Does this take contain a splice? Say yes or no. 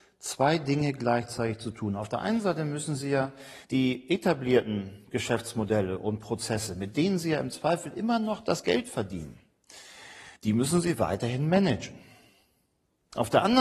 yes